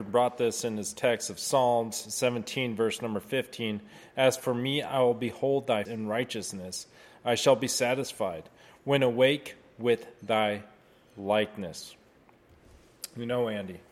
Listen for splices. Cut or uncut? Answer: cut